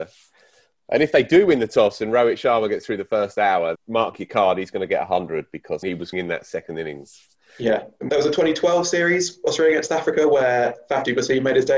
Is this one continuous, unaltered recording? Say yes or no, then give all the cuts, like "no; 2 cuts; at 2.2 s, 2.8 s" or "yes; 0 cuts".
no; 4 cuts; at 3.7 s, 5.8 s, 6.1 s, 8.1 s